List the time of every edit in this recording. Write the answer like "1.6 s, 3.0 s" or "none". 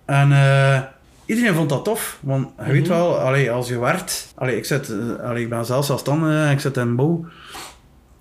1.0 s, 4.3 s